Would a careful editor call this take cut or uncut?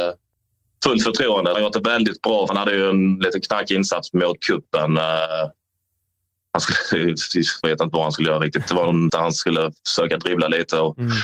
cut